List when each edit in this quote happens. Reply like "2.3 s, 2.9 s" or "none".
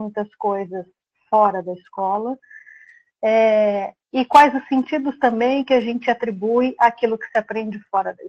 4.0 s